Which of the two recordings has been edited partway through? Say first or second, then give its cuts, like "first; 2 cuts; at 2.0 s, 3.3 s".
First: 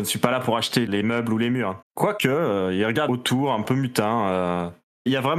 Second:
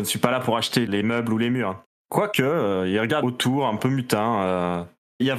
first; 1 cut; at 1.8 s